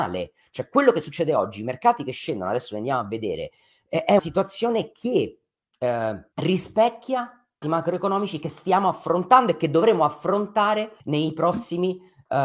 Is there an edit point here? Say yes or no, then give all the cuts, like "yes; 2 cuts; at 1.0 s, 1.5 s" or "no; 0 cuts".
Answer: yes; 4 cuts; at 4.2 s, 6.3 s, 7.6 s, 11.0 s